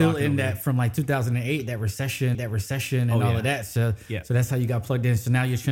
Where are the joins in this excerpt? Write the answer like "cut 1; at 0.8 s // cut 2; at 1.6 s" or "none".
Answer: cut 1; at 2.3 s